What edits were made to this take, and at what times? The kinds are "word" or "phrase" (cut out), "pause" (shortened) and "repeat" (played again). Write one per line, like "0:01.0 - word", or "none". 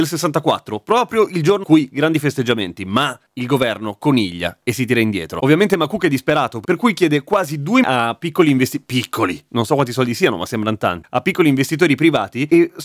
0:01.6 - phrase
0:03.3 - pause
0:07.8 - phrase